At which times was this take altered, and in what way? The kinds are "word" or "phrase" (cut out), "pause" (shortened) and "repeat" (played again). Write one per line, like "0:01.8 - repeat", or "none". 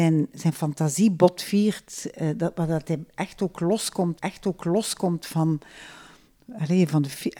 0:04.2 - repeat